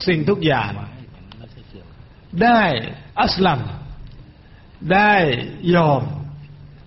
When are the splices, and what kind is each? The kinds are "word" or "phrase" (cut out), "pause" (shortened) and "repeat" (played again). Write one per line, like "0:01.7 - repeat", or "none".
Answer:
0:03.1 - pause